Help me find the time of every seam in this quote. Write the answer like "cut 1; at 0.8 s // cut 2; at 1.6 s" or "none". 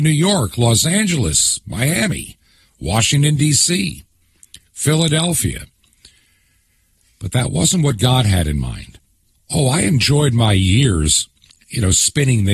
cut 1; at 9.3 s